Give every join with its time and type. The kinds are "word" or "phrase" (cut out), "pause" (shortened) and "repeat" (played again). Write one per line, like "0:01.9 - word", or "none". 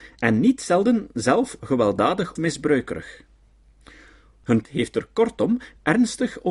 0:01.6 - word
0:02.4 - word
0:04.6 - word